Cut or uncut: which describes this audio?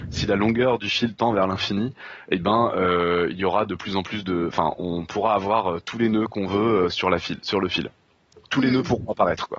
uncut